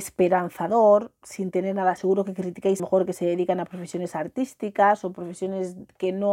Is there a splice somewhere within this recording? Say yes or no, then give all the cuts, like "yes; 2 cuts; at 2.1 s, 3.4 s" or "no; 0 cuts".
yes; 2 cuts; at 2.0 s, 2.8 s